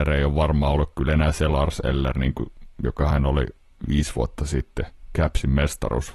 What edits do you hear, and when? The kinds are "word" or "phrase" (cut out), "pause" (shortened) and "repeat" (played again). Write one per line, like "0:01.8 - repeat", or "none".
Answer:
none